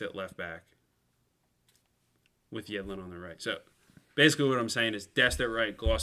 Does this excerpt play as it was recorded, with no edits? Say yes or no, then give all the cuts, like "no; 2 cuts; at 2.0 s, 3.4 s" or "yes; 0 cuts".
yes; 0 cuts